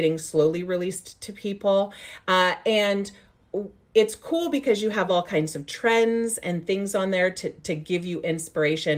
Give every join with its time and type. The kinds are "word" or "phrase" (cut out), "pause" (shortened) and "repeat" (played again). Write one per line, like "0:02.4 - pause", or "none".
none